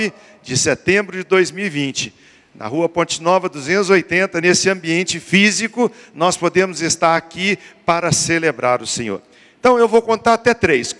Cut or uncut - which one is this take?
uncut